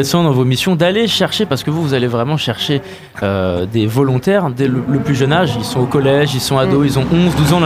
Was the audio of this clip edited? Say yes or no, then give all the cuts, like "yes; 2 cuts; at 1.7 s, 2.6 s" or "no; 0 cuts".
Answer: no; 0 cuts